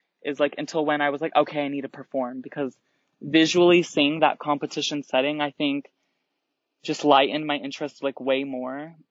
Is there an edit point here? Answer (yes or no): no